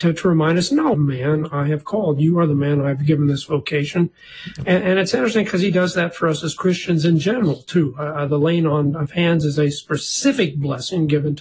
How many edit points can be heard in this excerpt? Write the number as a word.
one